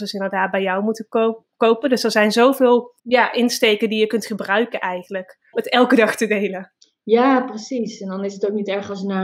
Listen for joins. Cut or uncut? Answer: cut